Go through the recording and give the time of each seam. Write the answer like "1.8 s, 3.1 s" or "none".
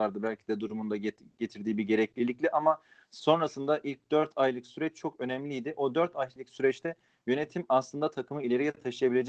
none